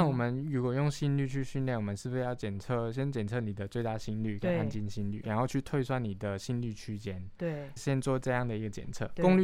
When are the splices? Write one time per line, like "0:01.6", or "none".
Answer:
0:05.2
0:07.8